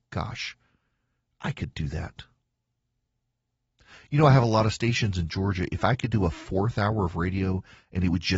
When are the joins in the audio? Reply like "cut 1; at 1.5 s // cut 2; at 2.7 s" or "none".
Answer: none